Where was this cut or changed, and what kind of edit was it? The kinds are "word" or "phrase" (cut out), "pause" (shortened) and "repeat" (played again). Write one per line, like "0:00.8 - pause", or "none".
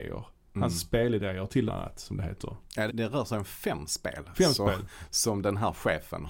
0:01.7 - phrase
0:02.9 - word

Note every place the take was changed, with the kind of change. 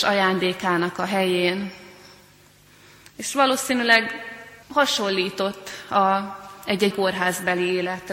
0:04.6 - pause
0:06.9 - word

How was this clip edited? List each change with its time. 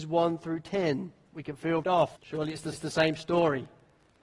0:01.8 - word
0:02.1 - pause
0:02.7 - repeat

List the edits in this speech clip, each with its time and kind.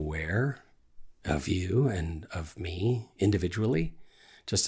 none

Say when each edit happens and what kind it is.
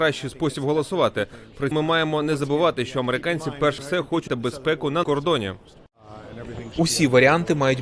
0:01.7 - word
0:03.8 - word
0:04.3 - word
0:05.0 - word

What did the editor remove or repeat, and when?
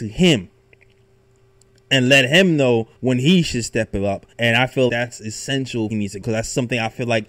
0:03.0 - pause
0:04.3 - pause
0:04.9 - word
0:05.9 - phrase
0:06.2 - word

